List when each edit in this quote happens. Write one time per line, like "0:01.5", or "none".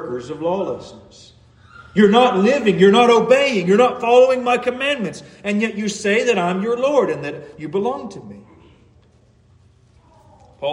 none